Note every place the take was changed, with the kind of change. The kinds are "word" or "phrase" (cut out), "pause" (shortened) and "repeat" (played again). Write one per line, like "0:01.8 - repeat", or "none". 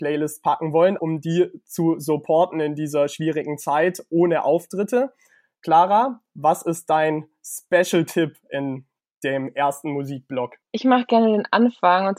0:01.0 - word